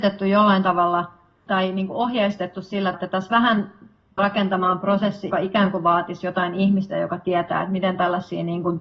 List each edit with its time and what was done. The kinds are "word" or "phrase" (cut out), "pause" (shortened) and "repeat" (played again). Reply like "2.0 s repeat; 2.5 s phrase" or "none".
1.5 s word; 2.9 s word; 4.2 s word; 5.3 s word